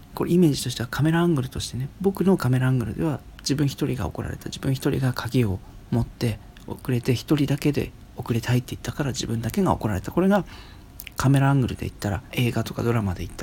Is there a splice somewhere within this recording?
yes; 1 cut; at 12.3 s

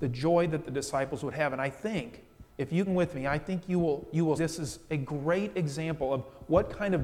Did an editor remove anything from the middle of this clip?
yes; 3 cuts; at 2.5 s, 2.9 s, 4.4 s

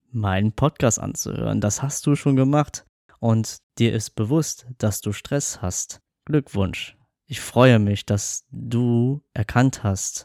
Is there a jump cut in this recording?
no; 0 cuts

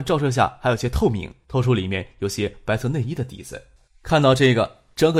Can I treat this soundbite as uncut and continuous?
no; 2 cuts; at 1.4 s, 3.9 s

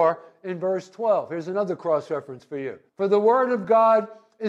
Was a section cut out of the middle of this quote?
yes; 1 cut; at 2.9 s

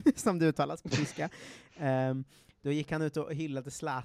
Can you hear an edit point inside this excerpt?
no; 0 cuts

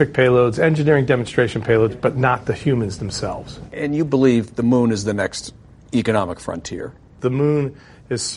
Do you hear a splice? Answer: no; 0 cuts

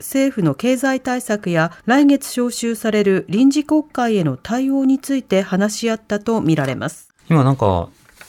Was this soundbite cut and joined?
yes; 2 cuts; at 1.8 s, 7.2 s

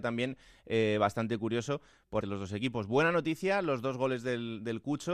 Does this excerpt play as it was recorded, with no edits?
no; 1 cut; at 2.2 s

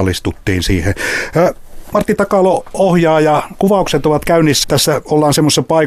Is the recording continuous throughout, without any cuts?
no; 1 cut; at 4.6 s

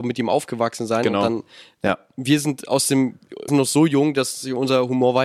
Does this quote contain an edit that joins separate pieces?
yes; 1 cut; at 3.5 s

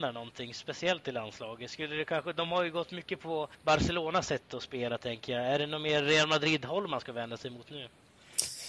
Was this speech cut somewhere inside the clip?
yes; 1 cut; at 3.5 s

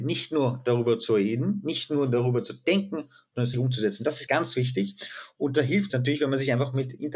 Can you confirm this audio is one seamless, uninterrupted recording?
no; 3 cuts; at 3.5 s, 4.3 s, 5.9 s

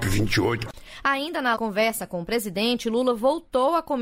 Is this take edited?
yes; 1 cut; at 1.6 s

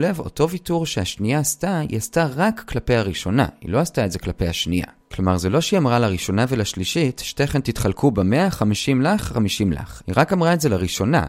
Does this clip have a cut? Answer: no; 0 cuts

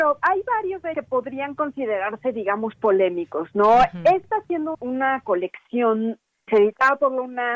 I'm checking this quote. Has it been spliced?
yes; 3 cuts; at 0.9 s, 4.7 s, 6.5 s

